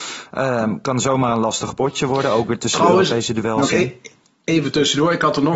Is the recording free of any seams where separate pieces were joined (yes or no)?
yes